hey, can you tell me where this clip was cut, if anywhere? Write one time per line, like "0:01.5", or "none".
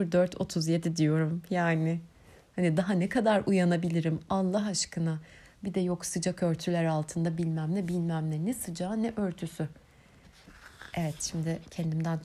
none